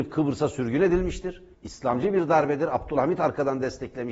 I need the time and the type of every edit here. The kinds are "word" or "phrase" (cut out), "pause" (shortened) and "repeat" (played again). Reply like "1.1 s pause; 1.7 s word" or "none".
1.5 s pause